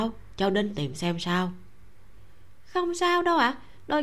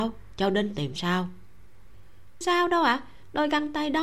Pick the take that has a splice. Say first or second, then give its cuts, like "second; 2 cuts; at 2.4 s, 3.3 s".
second; 2 cuts; at 1.0 s, 2.4 s